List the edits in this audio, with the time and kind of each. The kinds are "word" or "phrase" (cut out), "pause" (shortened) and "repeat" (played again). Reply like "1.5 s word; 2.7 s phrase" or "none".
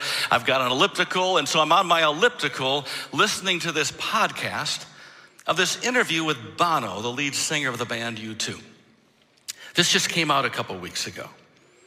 none